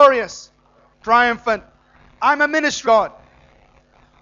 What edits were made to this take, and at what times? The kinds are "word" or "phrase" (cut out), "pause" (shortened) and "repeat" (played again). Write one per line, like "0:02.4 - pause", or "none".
0:00.9 - word
0:02.8 - word